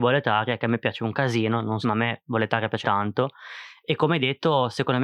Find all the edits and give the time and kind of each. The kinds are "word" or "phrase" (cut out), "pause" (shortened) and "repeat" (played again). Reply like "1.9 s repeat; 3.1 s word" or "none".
1.8 s phrase; 2.8 s word

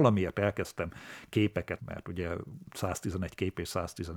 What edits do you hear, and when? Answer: 1.8 s word

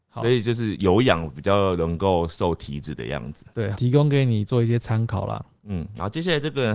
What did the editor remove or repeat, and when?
3.7 s word

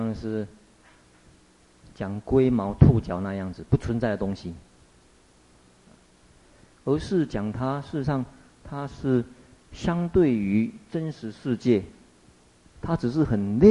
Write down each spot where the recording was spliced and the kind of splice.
none

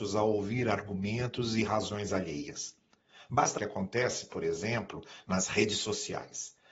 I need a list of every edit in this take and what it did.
3.6 s phrase

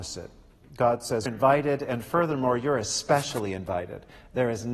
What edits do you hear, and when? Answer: 1.3 s word

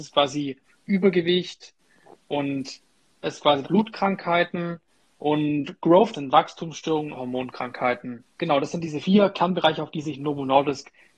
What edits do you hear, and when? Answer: 3.2 s word; 3.6 s word; 6.1 s word; 7.1 s phrase; 8.3 s pause; 9.0 s word

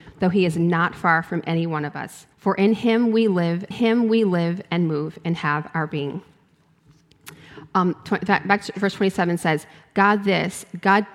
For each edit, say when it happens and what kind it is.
2.3 s pause; 3.7 s repeat

